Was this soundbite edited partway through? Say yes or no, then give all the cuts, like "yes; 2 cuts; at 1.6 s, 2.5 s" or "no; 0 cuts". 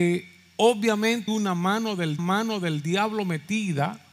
yes; 2 cuts; at 1.3 s, 2.2 s